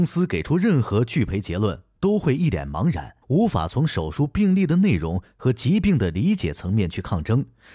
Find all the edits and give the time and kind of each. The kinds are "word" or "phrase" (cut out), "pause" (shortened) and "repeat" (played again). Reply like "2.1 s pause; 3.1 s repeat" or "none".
3.2 s pause